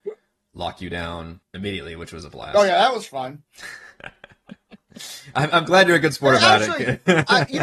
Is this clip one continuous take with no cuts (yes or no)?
no